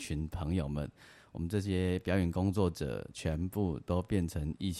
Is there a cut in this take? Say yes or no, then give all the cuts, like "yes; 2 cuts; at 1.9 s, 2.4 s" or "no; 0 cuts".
no; 0 cuts